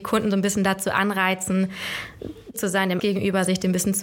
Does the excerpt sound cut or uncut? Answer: cut